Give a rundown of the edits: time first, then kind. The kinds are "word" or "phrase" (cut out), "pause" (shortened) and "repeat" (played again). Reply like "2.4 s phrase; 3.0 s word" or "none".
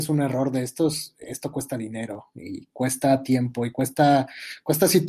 none